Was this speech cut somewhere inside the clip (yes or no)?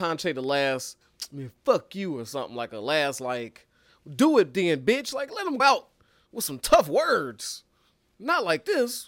yes